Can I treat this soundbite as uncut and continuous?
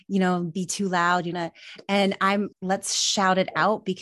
no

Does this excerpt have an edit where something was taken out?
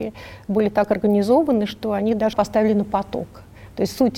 yes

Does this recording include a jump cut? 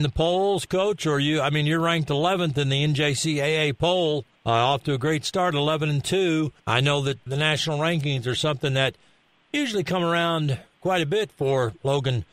yes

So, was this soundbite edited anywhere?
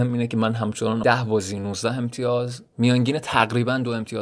yes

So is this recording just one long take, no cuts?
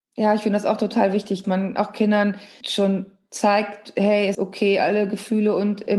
no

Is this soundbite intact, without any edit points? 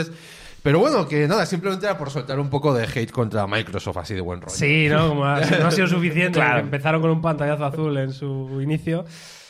yes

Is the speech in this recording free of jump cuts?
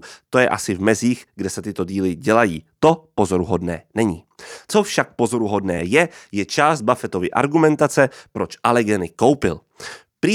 yes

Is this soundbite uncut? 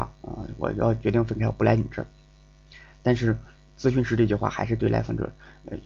yes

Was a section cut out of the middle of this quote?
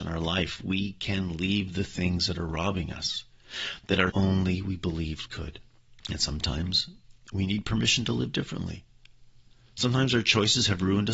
yes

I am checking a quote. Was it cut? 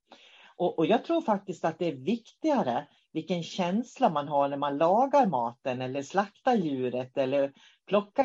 no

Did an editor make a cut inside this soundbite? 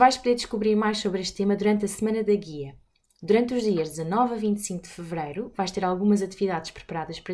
no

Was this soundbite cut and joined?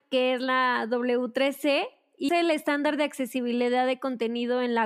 yes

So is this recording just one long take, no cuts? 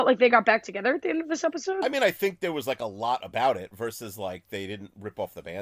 yes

